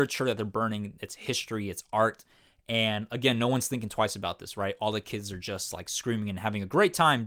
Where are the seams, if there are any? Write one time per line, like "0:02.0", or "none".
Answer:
none